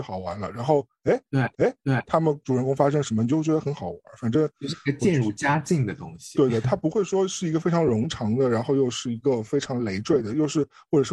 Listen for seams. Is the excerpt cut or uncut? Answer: cut